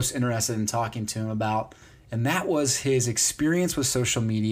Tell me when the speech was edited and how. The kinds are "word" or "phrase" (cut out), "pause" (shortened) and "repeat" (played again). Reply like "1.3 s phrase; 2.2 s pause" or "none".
1.8 s pause